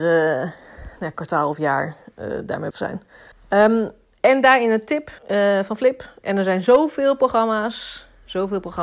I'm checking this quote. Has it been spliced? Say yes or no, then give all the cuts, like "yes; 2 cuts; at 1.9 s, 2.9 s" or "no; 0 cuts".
yes; 3 cuts; at 2.7 s, 3.3 s, 5.2 s